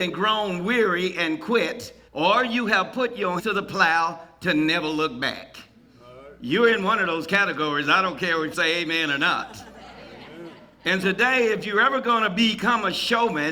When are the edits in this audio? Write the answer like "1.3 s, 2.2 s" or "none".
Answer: 2.1 s, 3.4 s, 8.5 s, 11.0 s